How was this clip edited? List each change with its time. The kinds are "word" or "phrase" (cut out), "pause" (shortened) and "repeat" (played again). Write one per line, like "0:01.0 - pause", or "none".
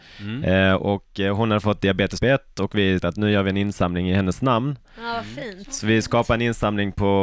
0:02.2 - word
0:03.0 - word